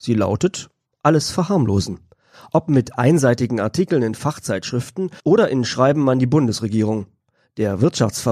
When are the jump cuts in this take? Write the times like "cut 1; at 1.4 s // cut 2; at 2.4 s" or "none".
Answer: cut 1; at 5.2 s